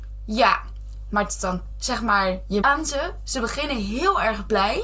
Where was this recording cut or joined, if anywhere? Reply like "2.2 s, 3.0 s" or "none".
1.7 s, 2.6 s